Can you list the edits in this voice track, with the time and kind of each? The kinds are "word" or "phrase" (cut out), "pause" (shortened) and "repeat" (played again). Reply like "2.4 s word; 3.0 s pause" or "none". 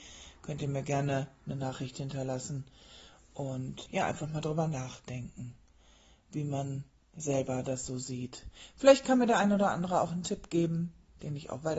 3.9 s word